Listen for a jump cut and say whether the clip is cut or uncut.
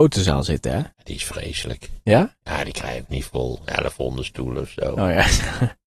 cut